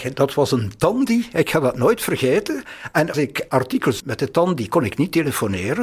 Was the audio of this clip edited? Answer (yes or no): yes